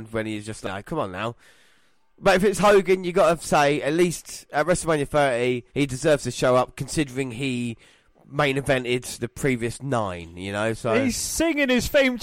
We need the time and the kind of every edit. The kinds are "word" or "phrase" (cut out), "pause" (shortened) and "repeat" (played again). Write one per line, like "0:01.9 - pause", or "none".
0:05.7 - pause